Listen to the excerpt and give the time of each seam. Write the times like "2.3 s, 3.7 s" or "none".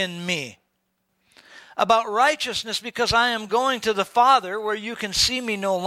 none